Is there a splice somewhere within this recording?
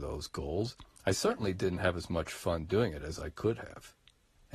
no; 0 cuts

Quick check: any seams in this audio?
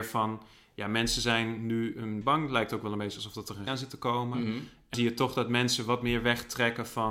yes; 3 cuts; at 2.2 s, 3.7 s, 4.9 s

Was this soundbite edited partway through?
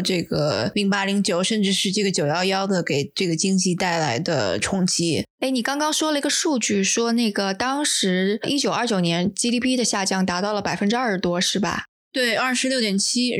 yes; 1 cut; at 5.3 s

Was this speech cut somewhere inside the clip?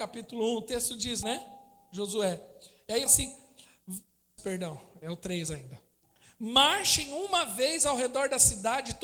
yes; 3 cuts; at 1.2 s, 3.1 s, 4.4 s

